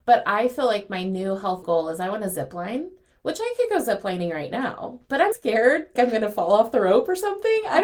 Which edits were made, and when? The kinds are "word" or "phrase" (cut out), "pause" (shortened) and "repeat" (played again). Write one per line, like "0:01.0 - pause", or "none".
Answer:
0:01.6 - word
0:05.3 - word
0:06.0 - word